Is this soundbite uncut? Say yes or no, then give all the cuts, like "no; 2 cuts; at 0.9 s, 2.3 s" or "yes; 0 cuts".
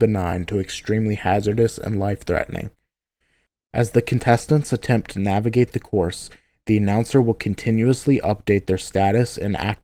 yes; 0 cuts